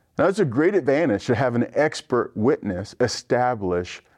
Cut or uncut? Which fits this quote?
uncut